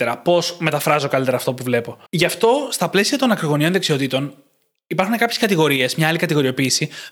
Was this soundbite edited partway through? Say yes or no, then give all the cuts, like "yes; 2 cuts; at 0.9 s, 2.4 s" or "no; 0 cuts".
yes; 1 cut; at 2.1 s